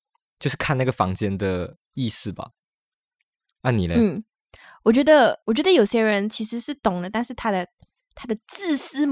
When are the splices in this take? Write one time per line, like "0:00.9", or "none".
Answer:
0:05.4